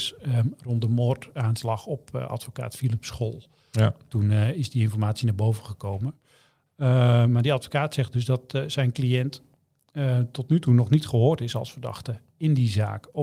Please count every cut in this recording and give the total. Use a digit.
0